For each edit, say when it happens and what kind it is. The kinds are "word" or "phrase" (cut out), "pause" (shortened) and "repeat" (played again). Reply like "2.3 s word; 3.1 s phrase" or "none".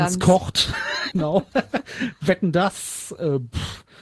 1.1 s word